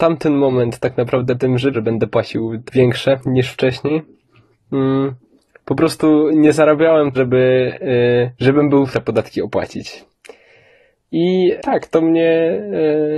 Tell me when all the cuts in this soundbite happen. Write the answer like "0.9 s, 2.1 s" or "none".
1.4 s, 1.7 s, 2.7 s, 6.3 s, 7.1 s, 8.3 s, 8.9 s, 11.6 s

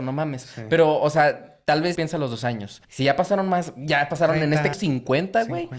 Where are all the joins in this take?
2.0 s, 2.8 s, 4.7 s

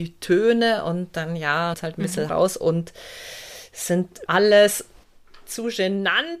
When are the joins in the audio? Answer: 1.7 s, 2.3 s, 4.3 s

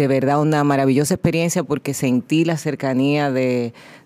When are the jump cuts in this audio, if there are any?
none

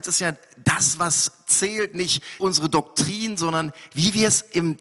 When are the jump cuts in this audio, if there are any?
2.4 s

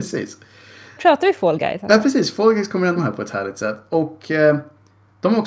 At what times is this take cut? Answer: 1.0 s, 3.0 s

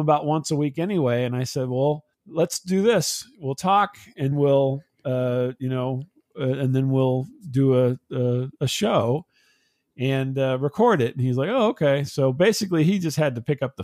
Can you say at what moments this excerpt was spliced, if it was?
2.1 s, 4.3 s

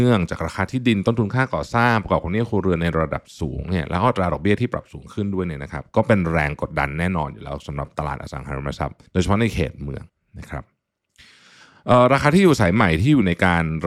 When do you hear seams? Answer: 9.1 s, 10.1 s

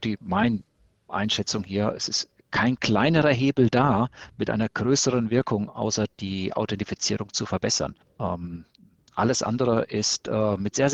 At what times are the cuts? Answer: 8.0 s

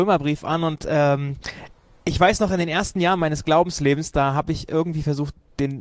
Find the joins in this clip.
none

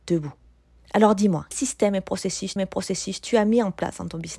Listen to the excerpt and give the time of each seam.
1.5 s, 2.6 s

